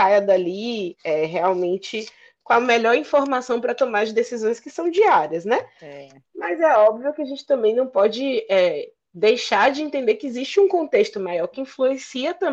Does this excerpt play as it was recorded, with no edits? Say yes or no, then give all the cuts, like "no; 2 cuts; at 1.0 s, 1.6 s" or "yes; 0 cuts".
yes; 0 cuts